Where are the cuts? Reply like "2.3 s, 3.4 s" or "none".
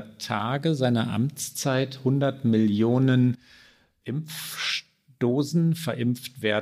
none